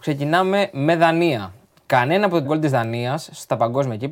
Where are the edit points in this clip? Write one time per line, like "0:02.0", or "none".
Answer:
0:02.4